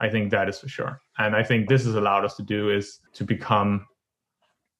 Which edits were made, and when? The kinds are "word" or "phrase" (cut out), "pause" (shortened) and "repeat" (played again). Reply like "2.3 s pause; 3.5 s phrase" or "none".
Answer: 1.7 s word; 3.1 s pause